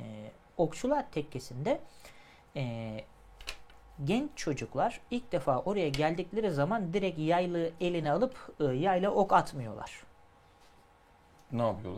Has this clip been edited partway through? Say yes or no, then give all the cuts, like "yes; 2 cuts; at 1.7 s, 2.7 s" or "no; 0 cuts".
no; 0 cuts